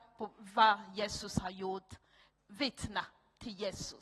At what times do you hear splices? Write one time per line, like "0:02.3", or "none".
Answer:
0:02.4